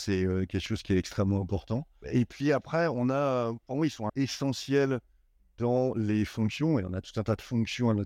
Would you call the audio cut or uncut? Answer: cut